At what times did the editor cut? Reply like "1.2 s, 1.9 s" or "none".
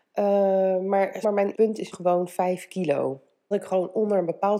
1.2 s, 1.5 s, 1.9 s, 3.5 s